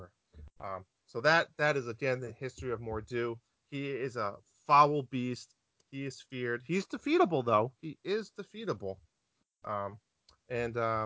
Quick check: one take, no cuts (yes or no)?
yes